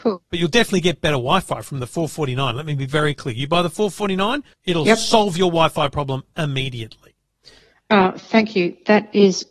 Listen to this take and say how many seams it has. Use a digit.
1